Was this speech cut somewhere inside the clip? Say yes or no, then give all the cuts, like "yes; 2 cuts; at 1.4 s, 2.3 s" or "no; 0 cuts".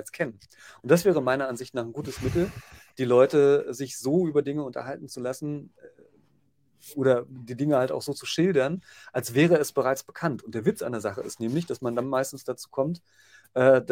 no; 0 cuts